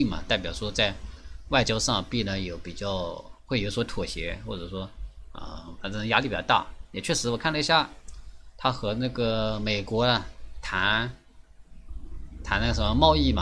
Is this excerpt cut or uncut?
cut